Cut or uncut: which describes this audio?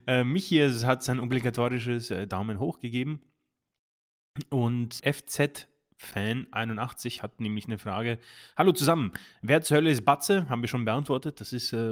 cut